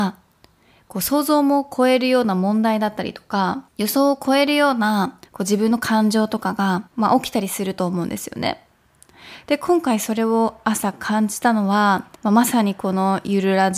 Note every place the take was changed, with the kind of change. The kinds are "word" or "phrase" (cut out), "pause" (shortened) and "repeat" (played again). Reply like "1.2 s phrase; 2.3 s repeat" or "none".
3.7 s pause; 5.3 s pause; 6.9 s pause; 12.2 s pause